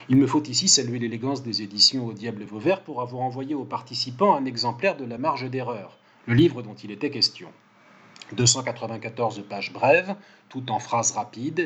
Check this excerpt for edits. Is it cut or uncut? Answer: uncut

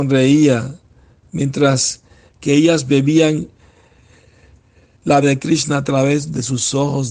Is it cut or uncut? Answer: cut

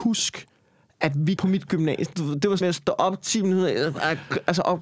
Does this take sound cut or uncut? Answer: cut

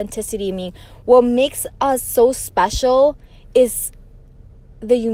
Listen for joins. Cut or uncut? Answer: uncut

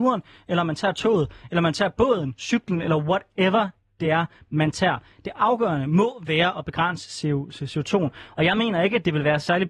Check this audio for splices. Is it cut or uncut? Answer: uncut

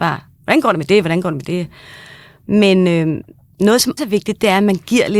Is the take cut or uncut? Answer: cut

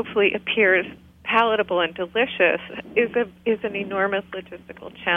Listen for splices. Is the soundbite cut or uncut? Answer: uncut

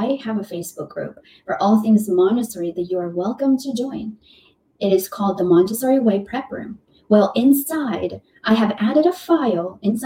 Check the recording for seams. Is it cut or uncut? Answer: uncut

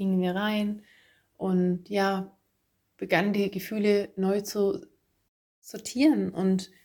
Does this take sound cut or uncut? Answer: uncut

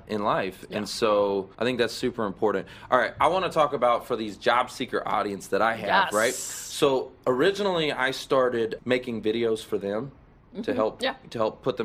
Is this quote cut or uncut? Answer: cut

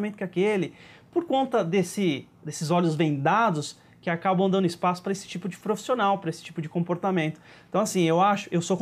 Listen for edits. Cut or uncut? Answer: uncut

